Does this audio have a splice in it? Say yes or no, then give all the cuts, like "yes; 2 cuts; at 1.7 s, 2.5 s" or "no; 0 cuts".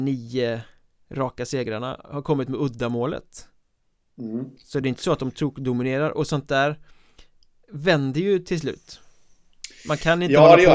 no; 0 cuts